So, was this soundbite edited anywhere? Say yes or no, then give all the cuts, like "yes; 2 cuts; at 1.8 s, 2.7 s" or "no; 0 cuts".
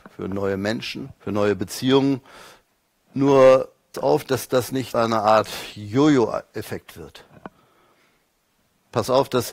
yes; 3 cuts; at 1.2 s, 3.9 s, 4.9 s